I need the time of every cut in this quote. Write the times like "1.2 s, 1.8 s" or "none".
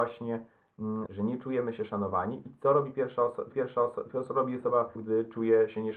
1.1 s, 3.5 s, 5.0 s